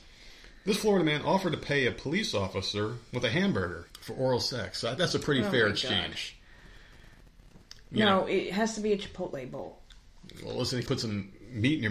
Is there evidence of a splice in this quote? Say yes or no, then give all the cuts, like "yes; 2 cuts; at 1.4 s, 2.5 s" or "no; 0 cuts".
yes; 3 cuts; at 3.9 s, 5.0 s, 10.9 s